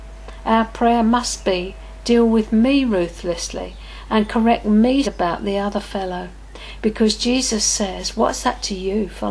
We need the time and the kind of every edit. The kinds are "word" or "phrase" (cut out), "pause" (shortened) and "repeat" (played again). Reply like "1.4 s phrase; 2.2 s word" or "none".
5.0 s phrase